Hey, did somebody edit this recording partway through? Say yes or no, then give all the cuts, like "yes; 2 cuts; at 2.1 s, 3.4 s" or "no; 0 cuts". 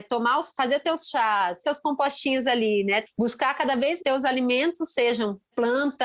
yes; 2 cuts; at 1.6 s, 4.0 s